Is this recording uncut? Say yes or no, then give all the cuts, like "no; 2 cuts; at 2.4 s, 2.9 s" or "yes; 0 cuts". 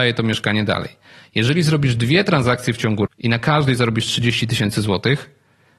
no; 1 cut; at 3.1 s